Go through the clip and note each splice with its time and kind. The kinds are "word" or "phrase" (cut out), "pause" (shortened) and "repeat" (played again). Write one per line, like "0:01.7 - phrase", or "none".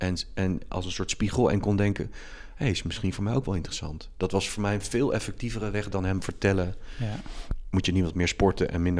none

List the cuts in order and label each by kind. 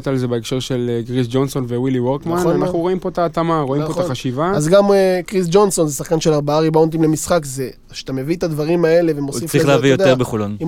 0:07.8 - pause

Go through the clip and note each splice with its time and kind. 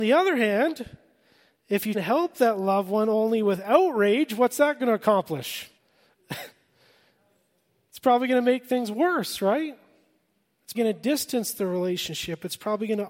0:01.9 - phrase
0:05.8 - pause
0:10.7 - word

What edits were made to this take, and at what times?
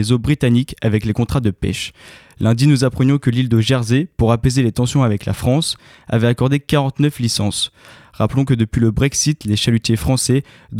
none

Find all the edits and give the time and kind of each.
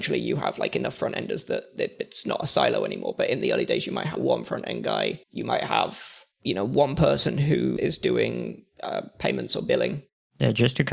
0:04.2 - word
0:05.2 - pause
0:06.3 - pause
0:07.8 - word

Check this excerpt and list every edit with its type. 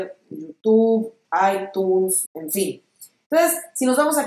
0:01.2 - word
0:02.3 - word

